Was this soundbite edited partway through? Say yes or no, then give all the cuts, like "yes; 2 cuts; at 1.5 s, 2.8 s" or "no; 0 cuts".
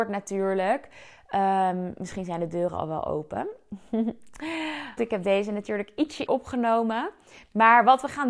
yes; 2 cuts; at 5.0 s, 6.3 s